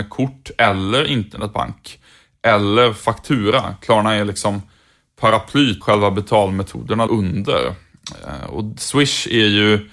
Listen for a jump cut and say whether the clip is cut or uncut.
cut